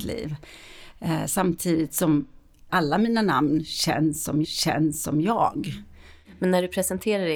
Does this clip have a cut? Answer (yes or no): yes